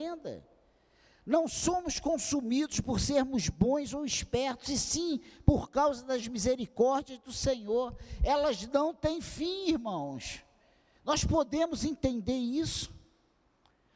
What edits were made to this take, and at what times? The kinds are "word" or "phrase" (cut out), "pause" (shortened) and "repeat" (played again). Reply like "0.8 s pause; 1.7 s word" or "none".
none